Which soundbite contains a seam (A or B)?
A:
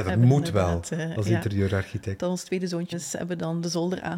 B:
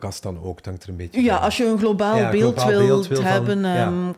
A